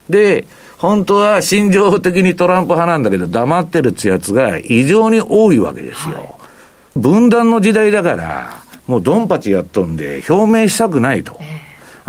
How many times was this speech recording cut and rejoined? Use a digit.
2